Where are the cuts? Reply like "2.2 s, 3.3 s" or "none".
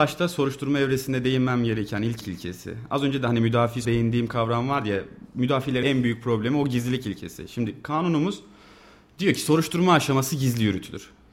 2.2 s, 3.8 s, 5.8 s